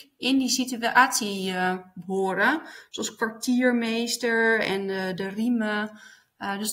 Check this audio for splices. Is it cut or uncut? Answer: uncut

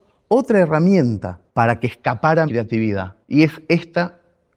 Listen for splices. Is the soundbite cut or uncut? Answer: cut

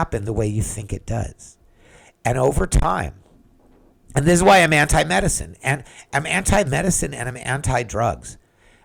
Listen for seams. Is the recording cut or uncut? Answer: uncut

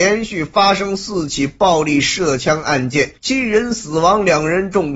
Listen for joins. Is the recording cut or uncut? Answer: cut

